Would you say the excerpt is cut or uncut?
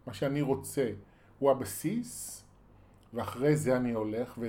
uncut